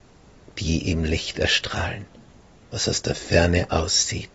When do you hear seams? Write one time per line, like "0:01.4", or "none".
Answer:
none